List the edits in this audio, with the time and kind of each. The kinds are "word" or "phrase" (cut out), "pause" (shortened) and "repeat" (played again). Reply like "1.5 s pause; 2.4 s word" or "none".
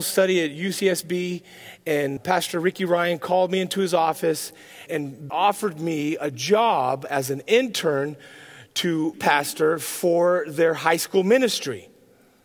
2.2 s word; 4.9 s word; 5.3 s word; 9.1 s phrase